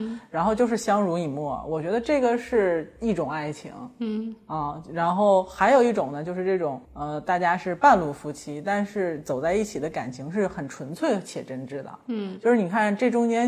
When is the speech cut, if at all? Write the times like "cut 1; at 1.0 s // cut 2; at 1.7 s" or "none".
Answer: cut 1; at 6.8 s